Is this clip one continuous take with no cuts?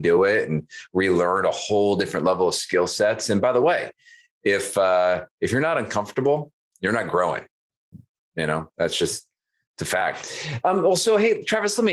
yes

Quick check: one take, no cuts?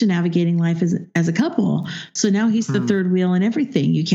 yes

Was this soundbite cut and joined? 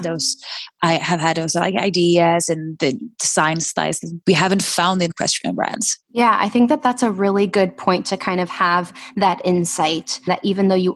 yes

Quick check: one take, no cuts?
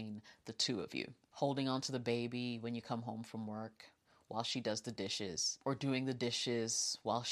yes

